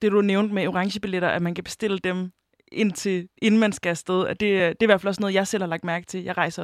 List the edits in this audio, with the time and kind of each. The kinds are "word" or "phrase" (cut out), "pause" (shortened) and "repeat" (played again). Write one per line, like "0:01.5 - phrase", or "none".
none